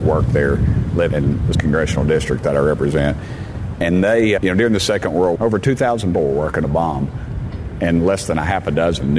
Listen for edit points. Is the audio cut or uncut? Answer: cut